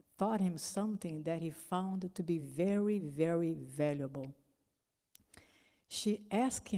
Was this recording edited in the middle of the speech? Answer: no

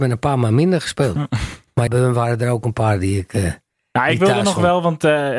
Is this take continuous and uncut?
no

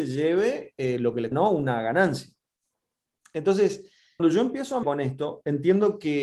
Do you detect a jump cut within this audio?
yes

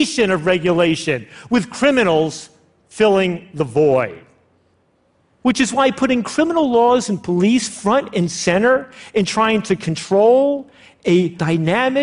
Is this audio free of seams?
yes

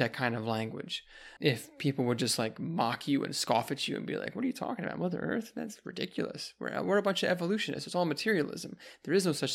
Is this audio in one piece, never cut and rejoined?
no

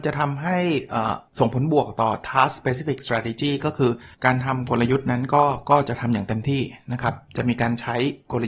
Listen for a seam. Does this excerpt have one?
yes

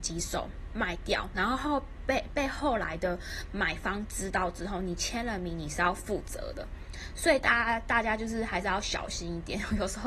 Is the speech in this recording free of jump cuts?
yes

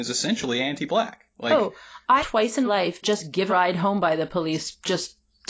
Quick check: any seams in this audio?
yes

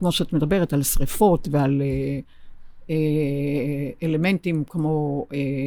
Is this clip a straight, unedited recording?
yes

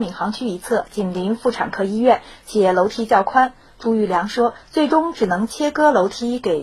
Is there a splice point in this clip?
no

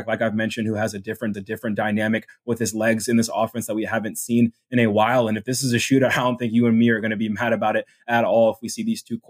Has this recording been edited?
yes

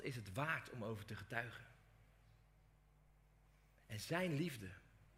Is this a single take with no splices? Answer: yes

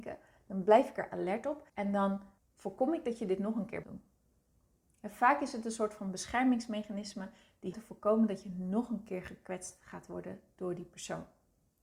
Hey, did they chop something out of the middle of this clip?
yes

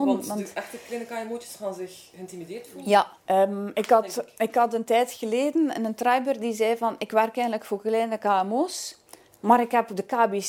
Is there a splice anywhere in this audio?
yes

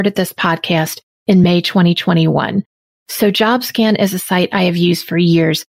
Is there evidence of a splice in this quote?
no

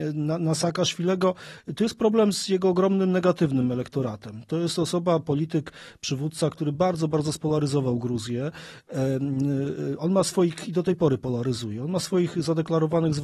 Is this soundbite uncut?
yes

